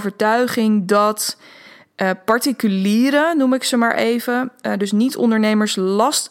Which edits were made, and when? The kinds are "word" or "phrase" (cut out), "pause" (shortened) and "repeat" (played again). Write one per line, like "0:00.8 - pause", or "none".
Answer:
none

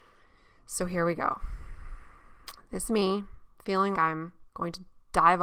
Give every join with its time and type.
0:02.9 - word
0:03.9 - word
0:04.5 - pause

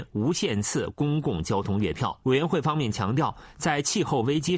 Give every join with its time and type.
0:02.2 - pause

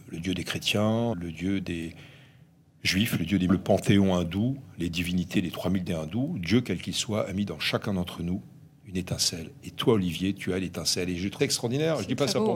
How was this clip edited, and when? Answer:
0:01.1 - word
0:03.5 - word
0:05.9 - word
0:11.4 - word

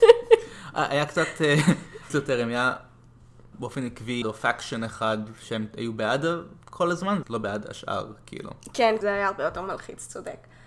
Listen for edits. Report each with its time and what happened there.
0:02.1 - phrase
0:03.5 - word
0:04.2 - phrase
0:07.2 - word
0:09.0 - word

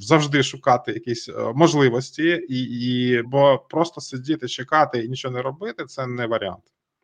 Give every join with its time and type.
0:03.2 - word

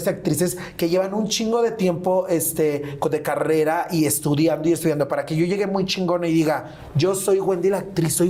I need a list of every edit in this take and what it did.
none

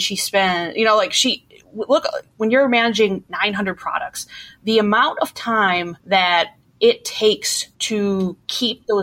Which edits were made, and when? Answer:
0:06.0 - pause
0:07.7 - pause

